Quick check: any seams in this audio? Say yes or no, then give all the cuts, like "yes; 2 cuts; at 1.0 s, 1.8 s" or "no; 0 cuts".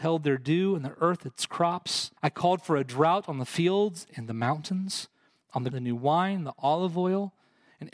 yes; 2 cuts; at 2.2 s, 5.7 s